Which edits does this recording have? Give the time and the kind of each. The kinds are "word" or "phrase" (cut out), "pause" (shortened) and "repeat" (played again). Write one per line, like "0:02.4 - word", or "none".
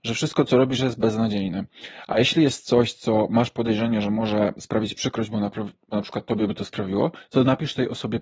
none

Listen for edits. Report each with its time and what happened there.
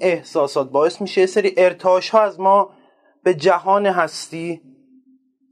none

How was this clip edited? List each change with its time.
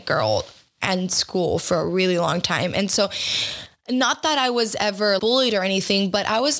0:05.2 - word

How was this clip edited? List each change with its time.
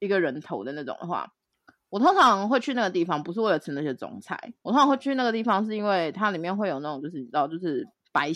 0:01.5 - pause
0:04.6 - pause

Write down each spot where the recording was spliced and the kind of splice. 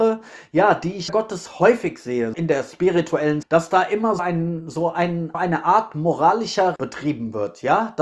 0:01.1 - word
0:02.3 - word
0:03.4 - word
0:04.2 - word
0:05.3 - word
0:06.8 - word

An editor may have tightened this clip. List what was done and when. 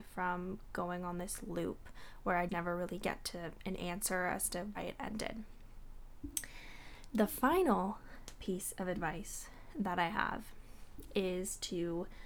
0:02.5 - word
0:04.7 - word

